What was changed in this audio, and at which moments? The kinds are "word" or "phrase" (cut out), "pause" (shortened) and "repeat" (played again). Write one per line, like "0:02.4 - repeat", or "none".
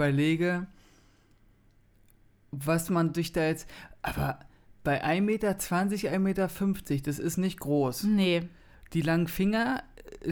none